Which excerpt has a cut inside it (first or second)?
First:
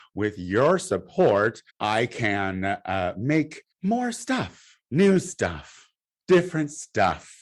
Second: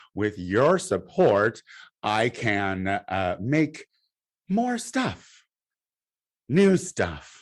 first